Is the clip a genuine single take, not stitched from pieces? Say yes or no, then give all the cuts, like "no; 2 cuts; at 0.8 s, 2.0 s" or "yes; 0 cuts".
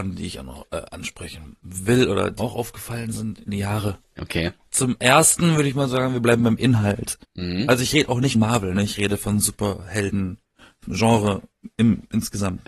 no; 6 cuts; at 2.4 s, 3.5 s, 4.0 s, 7.2 s, 8.3 s, 10.9 s